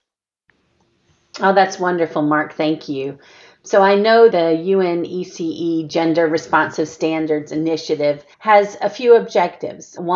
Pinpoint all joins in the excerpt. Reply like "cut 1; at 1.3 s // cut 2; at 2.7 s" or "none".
cut 1; at 4.3 s // cut 2; at 8.3 s